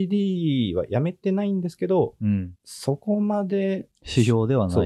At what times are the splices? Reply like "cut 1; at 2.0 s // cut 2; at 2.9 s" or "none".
cut 1; at 2.6 s